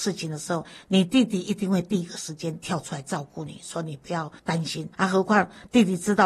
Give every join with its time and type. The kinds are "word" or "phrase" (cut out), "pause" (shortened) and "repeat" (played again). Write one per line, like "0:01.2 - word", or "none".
0:04.4 - pause
0:04.9 - pause